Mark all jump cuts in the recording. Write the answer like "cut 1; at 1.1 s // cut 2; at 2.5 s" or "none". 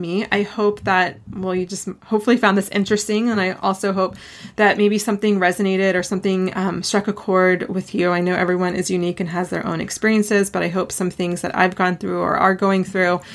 none

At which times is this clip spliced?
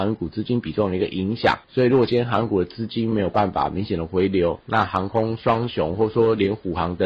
cut 1; at 1.6 s

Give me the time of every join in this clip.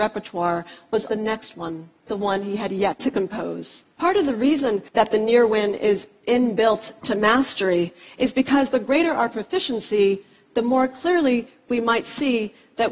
cut 1; at 1.1 s // cut 2; at 2.1 s // cut 3; at 3.9 s // cut 4; at 4.9 s

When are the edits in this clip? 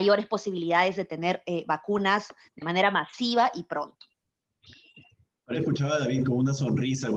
cut 1; at 5.5 s

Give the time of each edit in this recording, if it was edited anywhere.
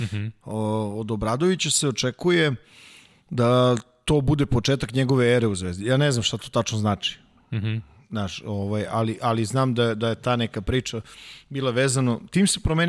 none

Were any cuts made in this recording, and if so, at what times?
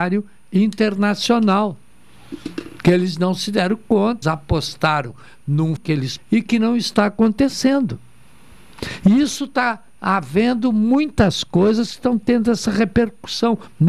cut 1; at 4.2 s // cut 2; at 5.8 s // cut 3; at 6.2 s

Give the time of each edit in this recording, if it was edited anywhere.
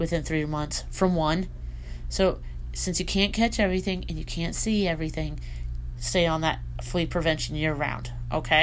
cut 1; at 5.9 s

